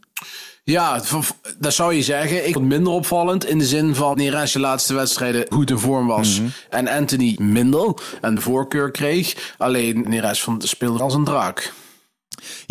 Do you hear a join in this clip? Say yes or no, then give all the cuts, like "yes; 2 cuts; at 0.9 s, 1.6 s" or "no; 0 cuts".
yes; 8 cuts; at 2.6 s, 4.1 s, 4.5 s, 5.5 s, 7.4 s, 8.4 s, 10.0 s, 11.0 s